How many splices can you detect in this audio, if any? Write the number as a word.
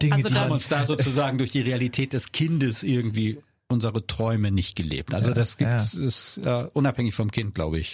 zero